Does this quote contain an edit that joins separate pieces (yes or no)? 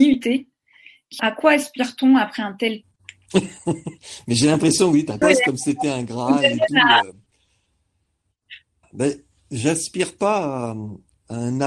yes